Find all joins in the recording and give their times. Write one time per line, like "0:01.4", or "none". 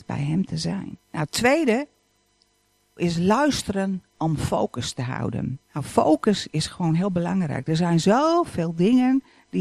0:01.0
0:03.0
0:05.6